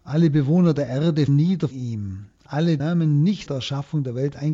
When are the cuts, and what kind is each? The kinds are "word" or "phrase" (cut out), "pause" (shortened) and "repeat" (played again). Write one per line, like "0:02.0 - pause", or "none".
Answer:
0:01.3 - word
0:01.7 - word
0:02.8 - word
0:03.5 - word